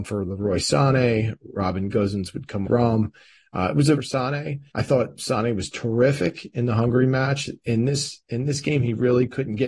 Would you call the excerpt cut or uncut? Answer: cut